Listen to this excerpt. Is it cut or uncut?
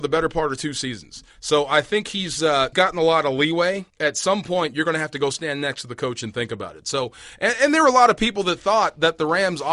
cut